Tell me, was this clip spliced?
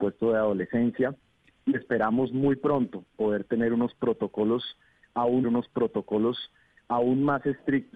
yes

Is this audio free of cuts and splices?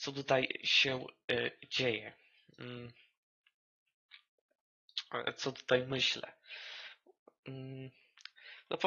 yes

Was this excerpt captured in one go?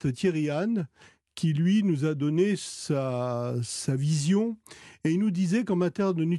yes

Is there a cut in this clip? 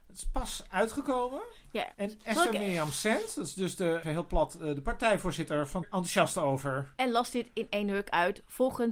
yes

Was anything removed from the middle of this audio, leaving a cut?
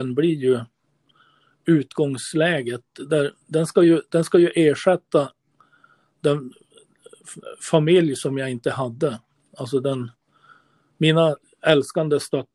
yes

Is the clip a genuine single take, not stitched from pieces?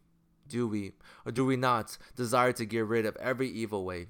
yes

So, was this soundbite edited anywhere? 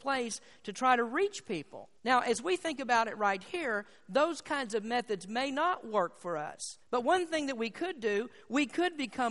yes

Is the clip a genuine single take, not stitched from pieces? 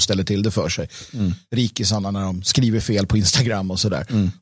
yes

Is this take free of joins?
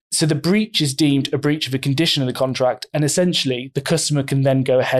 yes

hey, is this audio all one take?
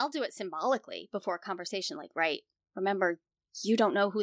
yes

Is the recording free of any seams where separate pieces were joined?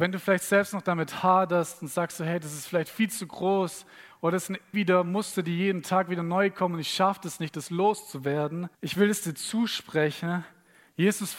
no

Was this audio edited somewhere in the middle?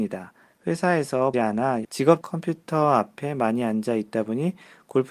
yes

